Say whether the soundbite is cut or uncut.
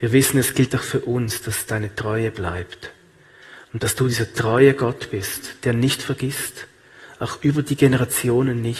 uncut